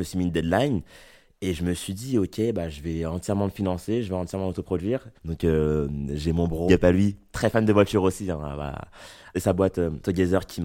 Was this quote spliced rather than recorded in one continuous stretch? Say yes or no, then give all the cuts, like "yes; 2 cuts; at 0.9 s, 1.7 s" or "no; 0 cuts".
yes; 2 cuts; at 5.2 s, 6.7 s